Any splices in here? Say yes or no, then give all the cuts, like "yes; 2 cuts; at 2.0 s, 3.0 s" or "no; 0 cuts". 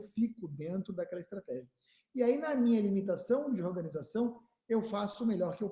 no; 0 cuts